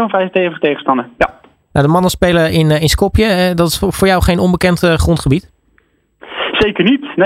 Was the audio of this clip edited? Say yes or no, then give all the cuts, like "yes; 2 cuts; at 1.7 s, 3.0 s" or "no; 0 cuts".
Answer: no; 0 cuts